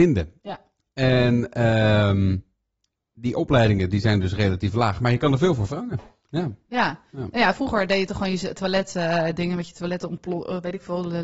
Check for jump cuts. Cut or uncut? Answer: uncut